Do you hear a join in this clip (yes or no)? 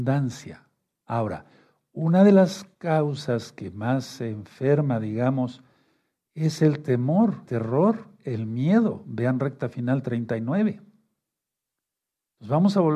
yes